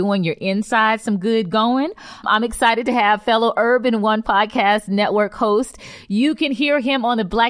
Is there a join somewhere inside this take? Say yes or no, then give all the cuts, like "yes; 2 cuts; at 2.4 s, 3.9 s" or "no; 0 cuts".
no; 0 cuts